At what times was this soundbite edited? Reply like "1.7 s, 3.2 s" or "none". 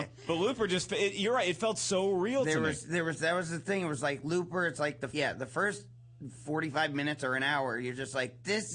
5.1 s